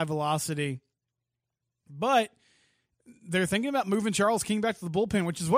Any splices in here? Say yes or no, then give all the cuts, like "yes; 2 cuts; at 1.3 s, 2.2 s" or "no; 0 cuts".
no; 0 cuts